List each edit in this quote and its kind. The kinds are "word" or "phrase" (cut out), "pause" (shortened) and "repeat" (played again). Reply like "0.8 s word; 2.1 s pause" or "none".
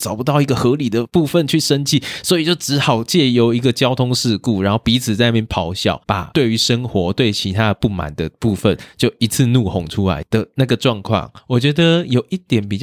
6.0 s pause; 11.4 s pause